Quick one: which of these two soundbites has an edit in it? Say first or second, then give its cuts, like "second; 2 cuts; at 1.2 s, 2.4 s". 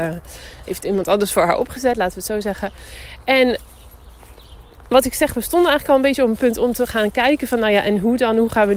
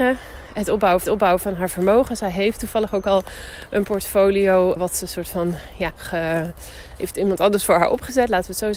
second; 3 cuts; at 1.0 s, 4.8 s, 5.9 s